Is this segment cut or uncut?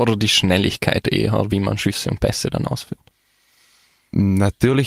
uncut